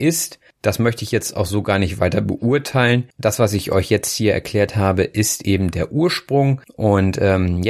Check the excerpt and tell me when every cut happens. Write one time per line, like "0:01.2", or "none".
none